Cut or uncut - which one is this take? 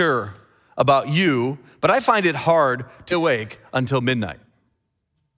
cut